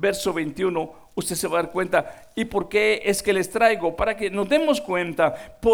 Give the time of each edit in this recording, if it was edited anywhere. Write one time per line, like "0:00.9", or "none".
none